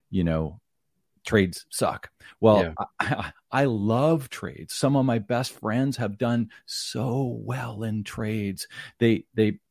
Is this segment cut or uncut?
uncut